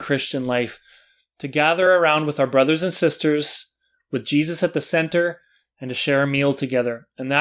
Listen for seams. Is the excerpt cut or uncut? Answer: uncut